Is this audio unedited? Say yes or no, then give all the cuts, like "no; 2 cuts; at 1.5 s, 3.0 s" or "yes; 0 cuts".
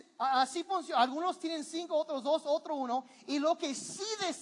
yes; 0 cuts